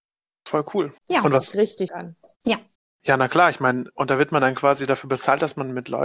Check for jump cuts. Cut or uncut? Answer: cut